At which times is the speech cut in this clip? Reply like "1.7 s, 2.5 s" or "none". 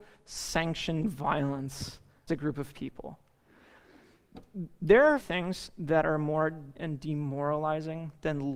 2.3 s, 5.2 s, 6.7 s